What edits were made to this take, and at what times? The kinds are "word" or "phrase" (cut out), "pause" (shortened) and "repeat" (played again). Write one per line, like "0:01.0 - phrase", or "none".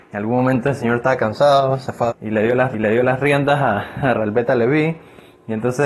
0:02.1 - word
0:02.7 - repeat
0:04.1 - phrase